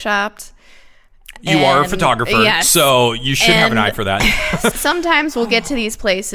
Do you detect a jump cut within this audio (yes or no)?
yes